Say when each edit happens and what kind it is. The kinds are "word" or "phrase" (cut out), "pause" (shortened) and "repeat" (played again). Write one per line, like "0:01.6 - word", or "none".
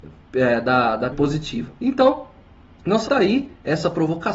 0:01.1 - word
0:01.7 - pause
0:03.0 - word